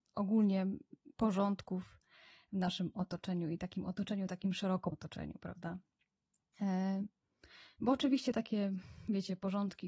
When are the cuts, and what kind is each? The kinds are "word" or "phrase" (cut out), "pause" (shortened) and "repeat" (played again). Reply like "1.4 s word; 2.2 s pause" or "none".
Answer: 1.1 s pause; 4.9 s word